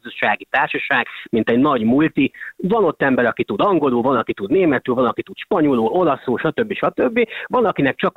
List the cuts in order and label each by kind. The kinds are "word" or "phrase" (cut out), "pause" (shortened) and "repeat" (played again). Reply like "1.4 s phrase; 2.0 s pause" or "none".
none

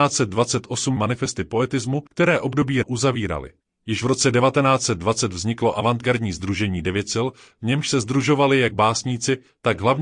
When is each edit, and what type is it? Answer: 1.0 s phrase; 2.1 s pause; 2.8 s phrase; 3.6 s pause

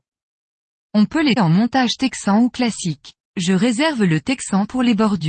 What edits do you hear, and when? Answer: 1.4 s word; 3.2 s pause

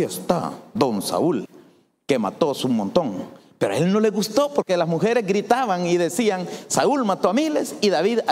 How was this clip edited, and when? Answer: none

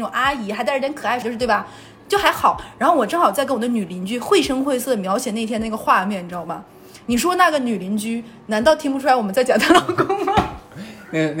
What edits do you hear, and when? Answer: 1.2 s phrase

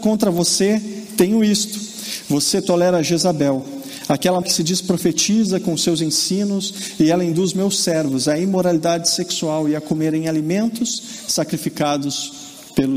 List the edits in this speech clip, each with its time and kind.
4.4 s word

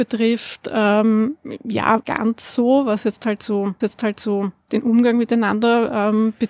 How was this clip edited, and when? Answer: 2.0 s phrase; 3.8 s repeat

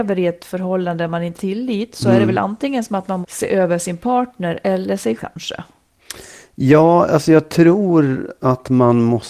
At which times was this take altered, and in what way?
1.3 s word; 3.2 s word; 5.2 s word

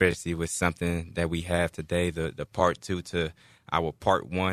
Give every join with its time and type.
none

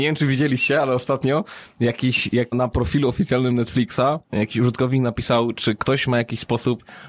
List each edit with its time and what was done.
2.5 s word; 4.2 s pause

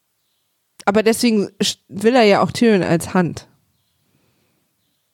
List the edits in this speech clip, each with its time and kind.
none

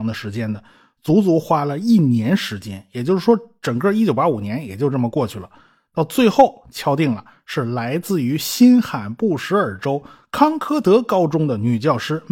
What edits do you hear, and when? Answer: none

